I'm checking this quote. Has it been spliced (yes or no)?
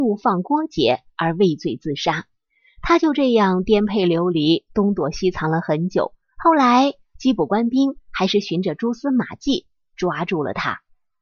no